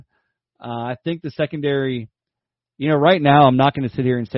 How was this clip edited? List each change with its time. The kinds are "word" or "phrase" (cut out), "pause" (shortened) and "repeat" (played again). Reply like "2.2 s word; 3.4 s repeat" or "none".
none